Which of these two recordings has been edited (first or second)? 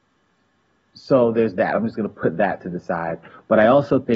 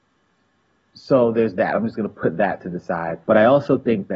second